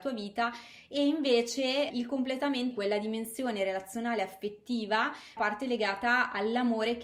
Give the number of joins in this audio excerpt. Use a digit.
3